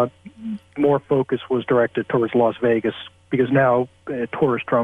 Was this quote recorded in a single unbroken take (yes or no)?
yes